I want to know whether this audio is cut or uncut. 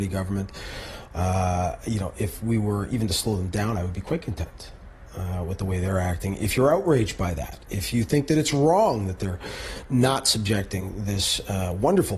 uncut